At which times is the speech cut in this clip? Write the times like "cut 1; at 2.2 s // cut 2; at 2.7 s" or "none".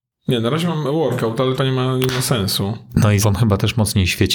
cut 1; at 1.6 s // cut 2; at 3.2 s